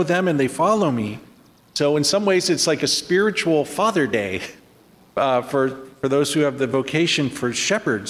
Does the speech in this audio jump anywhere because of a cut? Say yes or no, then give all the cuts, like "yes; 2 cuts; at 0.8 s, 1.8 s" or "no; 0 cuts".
no; 0 cuts